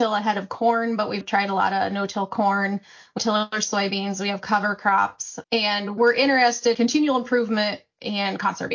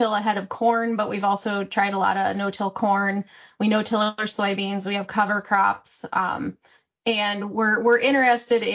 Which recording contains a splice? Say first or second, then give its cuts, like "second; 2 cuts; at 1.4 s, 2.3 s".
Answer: first; 5 cuts; at 1.2 s, 3.2 s, 5.4 s, 6.0 s, 6.7 s